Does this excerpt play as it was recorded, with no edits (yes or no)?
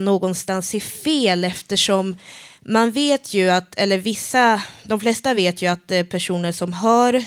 yes